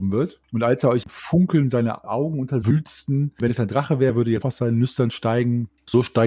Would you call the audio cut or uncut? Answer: cut